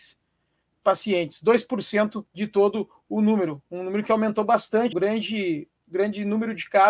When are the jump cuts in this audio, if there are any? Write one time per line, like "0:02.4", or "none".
0:02.3
0:04.9